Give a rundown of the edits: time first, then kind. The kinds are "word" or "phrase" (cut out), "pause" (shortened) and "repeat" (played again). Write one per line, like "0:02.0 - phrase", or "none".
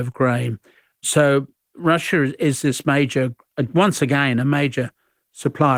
none